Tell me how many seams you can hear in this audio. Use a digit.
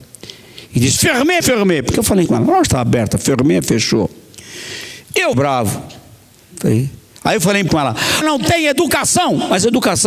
5